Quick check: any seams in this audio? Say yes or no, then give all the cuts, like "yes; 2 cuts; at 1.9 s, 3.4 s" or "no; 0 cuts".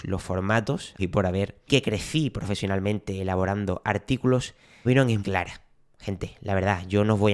yes; 4 cuts; at 1.0 s, 1.7 s, 4.8 s, 5.2 s